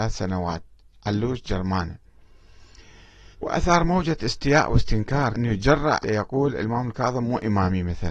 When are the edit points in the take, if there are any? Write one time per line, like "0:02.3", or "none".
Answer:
0:03.3
0:05.3
0:06.0